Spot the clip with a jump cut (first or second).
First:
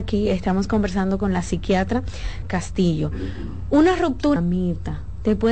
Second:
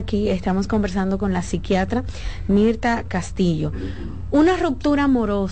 first